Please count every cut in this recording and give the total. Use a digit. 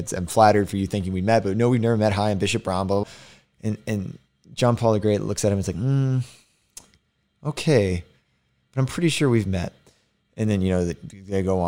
1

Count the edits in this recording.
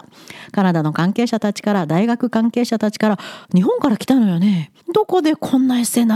2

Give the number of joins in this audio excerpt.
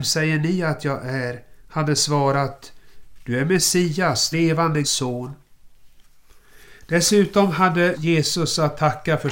4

